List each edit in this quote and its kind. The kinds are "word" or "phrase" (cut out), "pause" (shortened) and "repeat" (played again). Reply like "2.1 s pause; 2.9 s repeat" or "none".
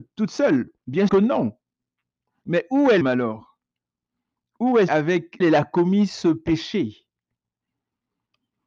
1.1 s word; 3.0 s word; 4.9 s word; 5.4 s word